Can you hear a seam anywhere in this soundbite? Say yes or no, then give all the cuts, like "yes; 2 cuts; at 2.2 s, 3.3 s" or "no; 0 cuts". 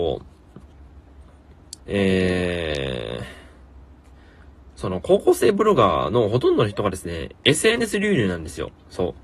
yes; 1 cut; at 1.8 s